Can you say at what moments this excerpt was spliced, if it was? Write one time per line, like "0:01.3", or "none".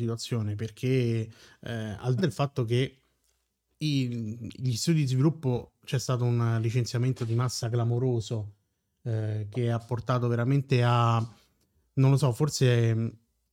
0:02.2

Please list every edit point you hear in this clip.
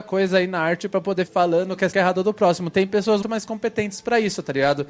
0:01.3
0:01.9
0:03.2

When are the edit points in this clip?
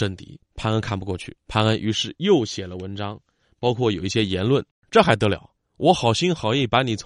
0:01.4
0:04.7

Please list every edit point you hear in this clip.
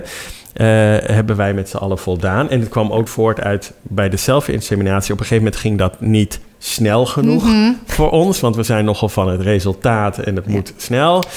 0:03.1
0:03.8
0:06.5

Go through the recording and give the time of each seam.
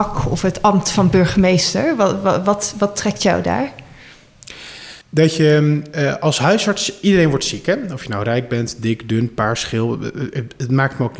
0:05.0

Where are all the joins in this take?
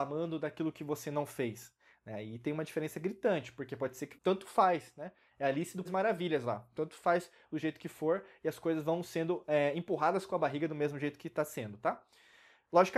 0:04.1
0:05.8

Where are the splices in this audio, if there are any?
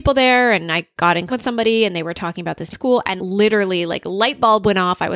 0:01.3
0:02.7
0:03.2

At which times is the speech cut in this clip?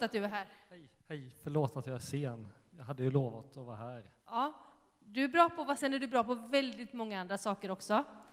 0:01.0
0:04.2
0:05.8

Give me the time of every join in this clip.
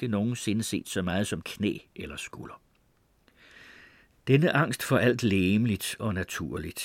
0:01.4

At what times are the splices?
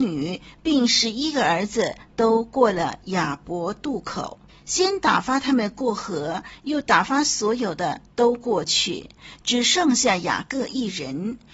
0:04.5

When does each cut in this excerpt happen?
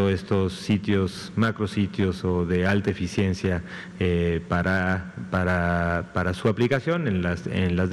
none

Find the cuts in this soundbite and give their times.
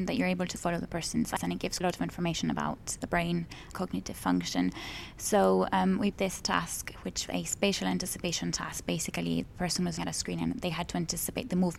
0:01.4
0:01.8
0:03.0
0:03.7
0:06.1
0:07.3
0:09.5
0:10.0

